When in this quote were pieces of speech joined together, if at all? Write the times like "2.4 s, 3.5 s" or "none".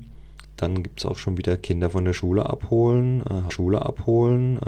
3.5 s